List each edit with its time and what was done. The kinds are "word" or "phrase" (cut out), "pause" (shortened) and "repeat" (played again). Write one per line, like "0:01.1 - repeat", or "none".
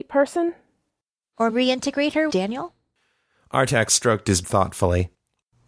0:01.5 - word
0:02.3 - word
0:04.4 - word